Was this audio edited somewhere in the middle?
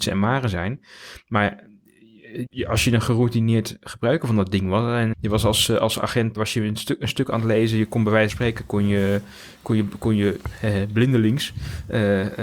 yes; 4 cuts; at 2.5 s, 5.1 s, 6.4 s, 8.3 s

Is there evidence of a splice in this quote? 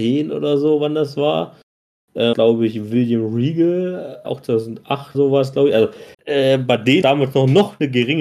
yes; 5 cuts; at 2.3 s, 4.2 s, 5.1 s, 6.1 s, 7.0 s

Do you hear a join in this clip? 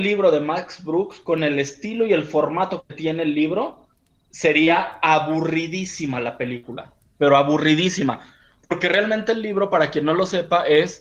no; 0 cuts

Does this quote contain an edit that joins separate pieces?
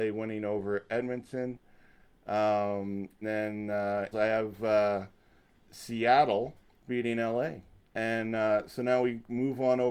yes; 4 cuts; at 3.2 s, 4.1 s, 6.6 s, 7.8 s

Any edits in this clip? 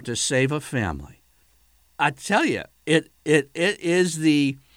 yes; 2 cuts; at 1.4 s, 3.2 s

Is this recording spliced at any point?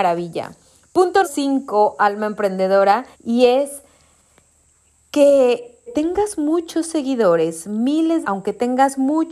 yes; 4 cuts; at 1.2 s, 3.1 s, 5.9 s, 8.2 s

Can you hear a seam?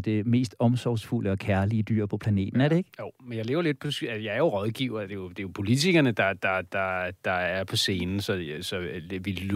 no; 0 cuts

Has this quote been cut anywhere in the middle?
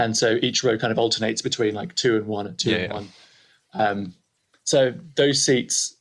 no; 0 cuts

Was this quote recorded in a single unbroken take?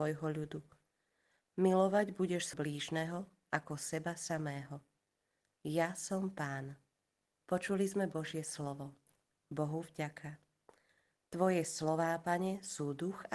no; 2 cuts; at 2.5 s, 7.3 s

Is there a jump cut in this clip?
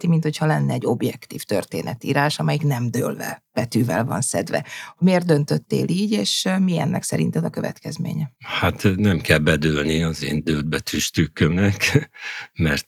yes; 1 cut; at 3.5 s

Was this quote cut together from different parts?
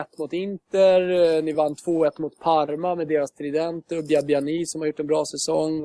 no; 0 cuts

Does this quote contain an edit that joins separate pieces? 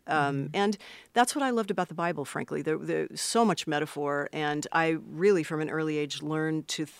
no; 0 cuts

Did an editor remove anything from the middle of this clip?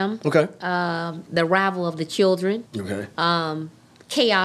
yes; 1 cut; at 2.7 s

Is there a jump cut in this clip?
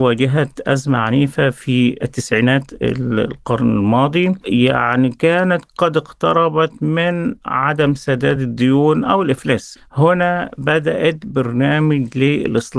no; 0 cuts

